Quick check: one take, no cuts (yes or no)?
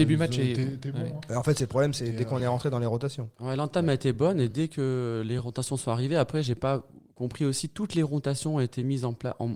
yes